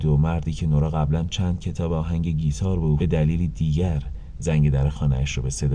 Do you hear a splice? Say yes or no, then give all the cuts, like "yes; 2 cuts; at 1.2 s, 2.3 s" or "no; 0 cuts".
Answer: yes; 1 cut; at 3.0 s